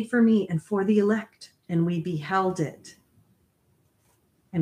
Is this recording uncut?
no; 1 cut; at 1.6 s

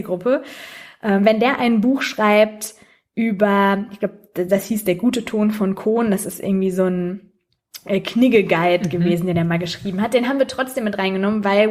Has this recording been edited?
no; 0 cuts

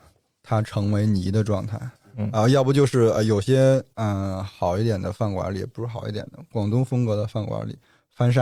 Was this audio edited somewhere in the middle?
no; 0 cuts

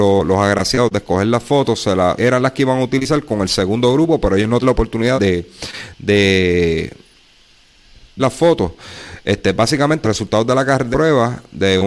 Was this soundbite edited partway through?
yes; 6 cuts; at 2.2 s, 4.6 s, 5.2 s, 8.2 s, 10.0 s, 10.9 s

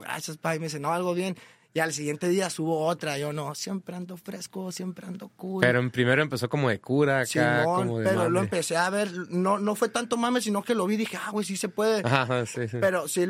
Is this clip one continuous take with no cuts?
yes; 0 cuts

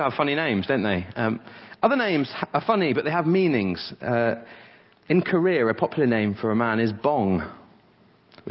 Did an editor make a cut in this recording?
no; 0 cuts

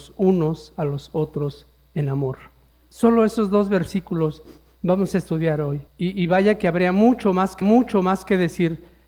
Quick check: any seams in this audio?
yes; 3 cuts; at 2.7 s, 5.9 s, 7.6 s

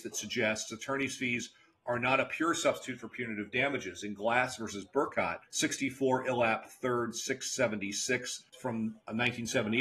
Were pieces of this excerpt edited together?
yes; 2 cuts; at 5.5 s, 8.5 s

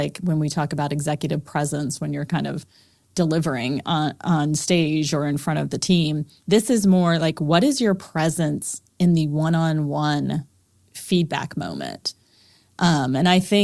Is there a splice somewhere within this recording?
no; 0 cuts

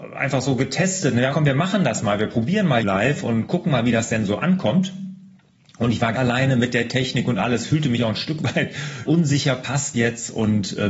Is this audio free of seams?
no; 5 cuts; at 1.3 s, 2.8 s, 6.1 s, 9.0 s, 9.9 s

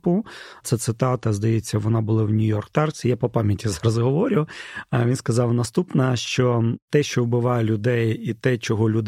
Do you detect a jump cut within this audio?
no; 0 cuts

